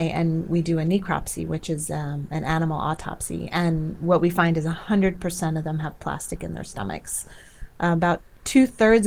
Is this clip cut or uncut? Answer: uncut